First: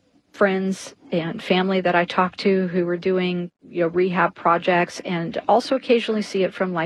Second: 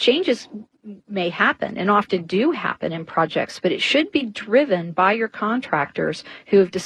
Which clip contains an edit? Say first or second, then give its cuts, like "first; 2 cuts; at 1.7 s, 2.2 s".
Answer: first; 1 cut; at 3.5 s